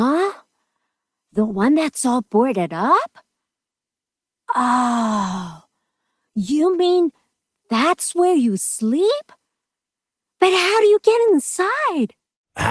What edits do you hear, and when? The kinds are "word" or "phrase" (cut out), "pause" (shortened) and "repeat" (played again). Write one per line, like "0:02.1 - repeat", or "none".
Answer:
none